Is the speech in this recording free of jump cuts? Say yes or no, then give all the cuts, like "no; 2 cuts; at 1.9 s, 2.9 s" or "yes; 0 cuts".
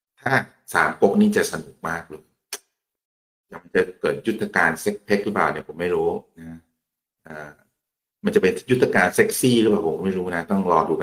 yes; 0 cuts